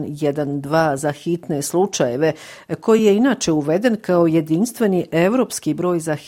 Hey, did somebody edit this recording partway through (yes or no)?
no